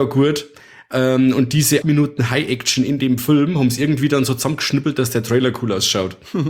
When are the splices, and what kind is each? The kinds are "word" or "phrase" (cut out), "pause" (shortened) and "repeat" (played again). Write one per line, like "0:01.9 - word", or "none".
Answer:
0:01.8 - word